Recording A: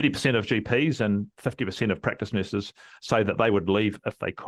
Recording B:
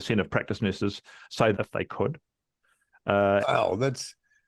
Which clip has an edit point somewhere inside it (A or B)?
B